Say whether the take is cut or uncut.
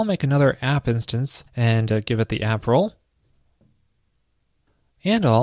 cut